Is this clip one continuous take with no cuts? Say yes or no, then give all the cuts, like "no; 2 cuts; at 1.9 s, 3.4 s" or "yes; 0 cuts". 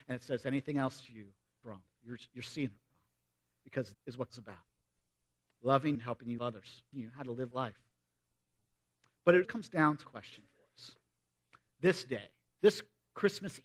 no; 9 cuts; at 1.6 s, 3.9 s, 4.3 s, 5.9 s, 6.4 s, 6.9 s, 7.5 s, 9.4 s, 10.0 s